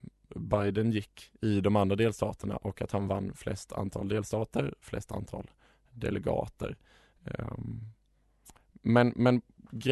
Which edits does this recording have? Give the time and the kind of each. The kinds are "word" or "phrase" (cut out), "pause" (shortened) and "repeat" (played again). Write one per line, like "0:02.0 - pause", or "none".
none